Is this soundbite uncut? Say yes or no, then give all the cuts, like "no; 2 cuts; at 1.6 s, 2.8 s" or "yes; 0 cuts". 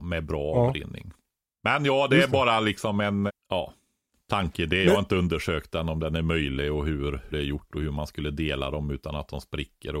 no; 2 cuts; at 3.3 s, 7.3 s